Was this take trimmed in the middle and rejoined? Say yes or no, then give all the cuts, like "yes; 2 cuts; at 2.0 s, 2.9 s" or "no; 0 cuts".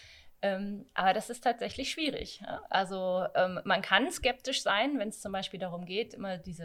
no; 0 cuts